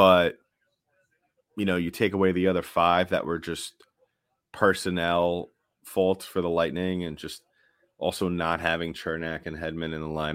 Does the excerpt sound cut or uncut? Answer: uncut